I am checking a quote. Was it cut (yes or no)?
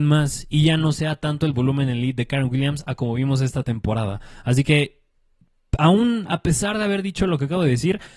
no